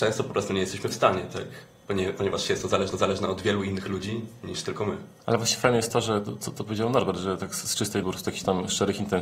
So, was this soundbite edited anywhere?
yes; 3 cuts; at 2.9 s, 5.2 s, 8.0 s

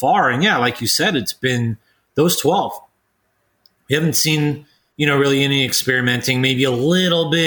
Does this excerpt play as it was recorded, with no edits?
yes; 0 cuts

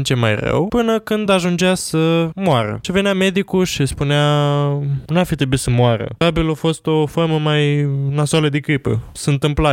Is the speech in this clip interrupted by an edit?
no; 0 cuts

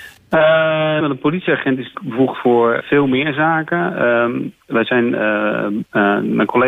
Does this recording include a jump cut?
yes; 3 cuts; at 1.0 s, 1.9 s, 2.8 s

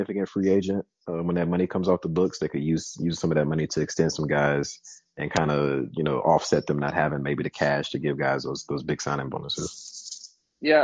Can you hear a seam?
no; 0 cuts

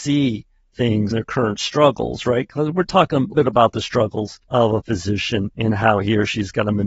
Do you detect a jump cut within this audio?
yes; 4 cuts; at 1.1 s, 3.3 s, 4.4 s, 5.5 s

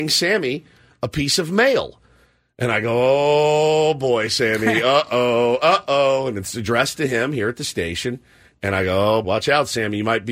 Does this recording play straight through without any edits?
no; 1 cut; at 9.2 s

